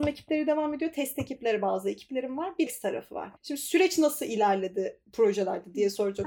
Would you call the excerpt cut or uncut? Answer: cut